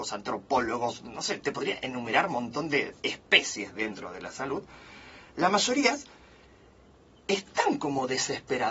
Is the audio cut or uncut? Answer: uncut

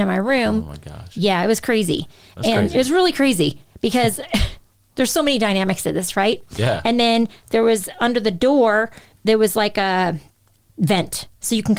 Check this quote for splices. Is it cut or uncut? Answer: uncut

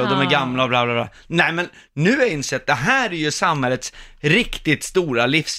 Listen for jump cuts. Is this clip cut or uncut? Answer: uncut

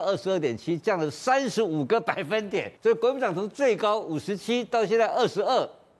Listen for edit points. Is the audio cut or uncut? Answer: cut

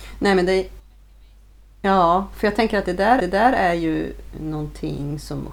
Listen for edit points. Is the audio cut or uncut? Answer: cut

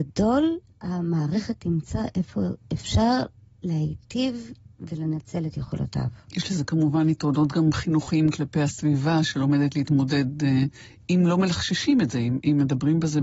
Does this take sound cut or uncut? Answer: uncut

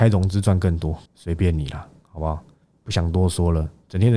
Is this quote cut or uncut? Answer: cut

